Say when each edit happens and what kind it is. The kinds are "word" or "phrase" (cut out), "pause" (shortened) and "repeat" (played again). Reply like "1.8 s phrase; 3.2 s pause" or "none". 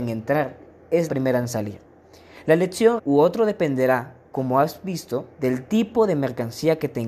1.1 s word; 3.0 s phrase; 5.3 s pause